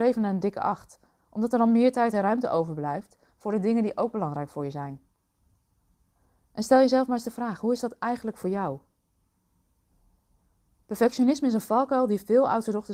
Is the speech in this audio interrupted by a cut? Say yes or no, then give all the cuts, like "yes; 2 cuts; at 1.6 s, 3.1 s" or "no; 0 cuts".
no; 0 cuts